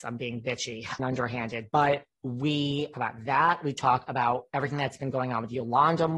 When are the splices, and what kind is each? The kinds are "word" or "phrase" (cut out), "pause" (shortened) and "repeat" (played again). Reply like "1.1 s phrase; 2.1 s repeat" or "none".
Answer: 1.0 s word; 2.9 s word